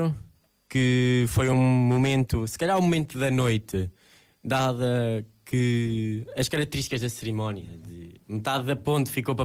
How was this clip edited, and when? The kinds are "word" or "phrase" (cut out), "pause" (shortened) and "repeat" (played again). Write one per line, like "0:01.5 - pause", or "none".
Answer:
none